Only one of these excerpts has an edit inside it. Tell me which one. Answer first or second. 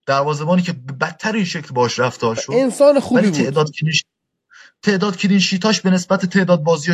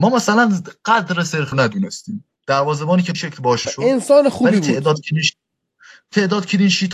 second